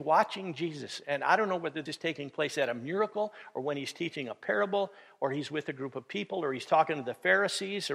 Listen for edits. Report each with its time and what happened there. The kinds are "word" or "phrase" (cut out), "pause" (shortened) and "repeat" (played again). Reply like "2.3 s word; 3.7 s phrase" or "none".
1.9 s word

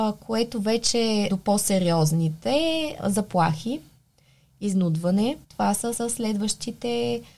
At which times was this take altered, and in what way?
1.3 s word; 3.0 s word; 5.4 s pause; 5.9 s repeat

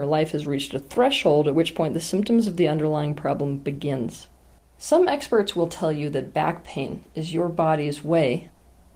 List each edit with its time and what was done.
none

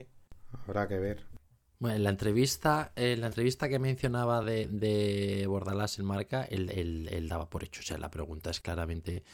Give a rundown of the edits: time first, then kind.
none

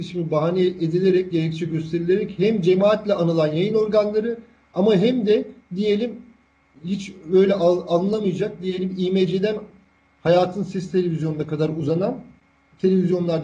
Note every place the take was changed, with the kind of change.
none

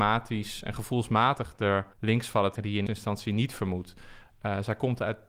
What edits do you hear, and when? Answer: 1.9 s pause; 2.6 s word; 2.9 s word

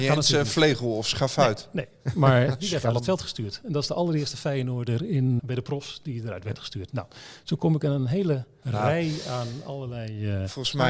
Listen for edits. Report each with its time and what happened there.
2.6 s phrase; 5.4 s word; 8.6 s word

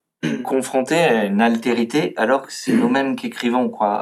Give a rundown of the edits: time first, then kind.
none

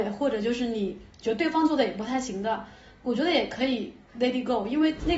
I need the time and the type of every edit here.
4.1 s pause

